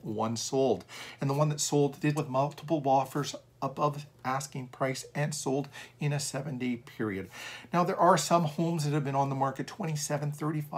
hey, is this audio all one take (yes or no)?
no